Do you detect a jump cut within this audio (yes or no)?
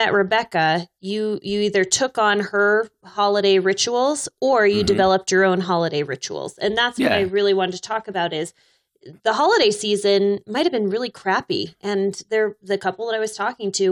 yes